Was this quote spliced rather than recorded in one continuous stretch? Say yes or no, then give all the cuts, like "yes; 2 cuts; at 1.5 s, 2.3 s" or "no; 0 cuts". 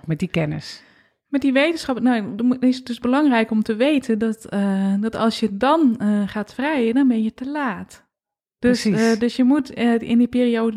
no; 0 cuts